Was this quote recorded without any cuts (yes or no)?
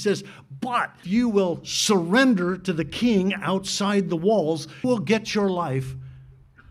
no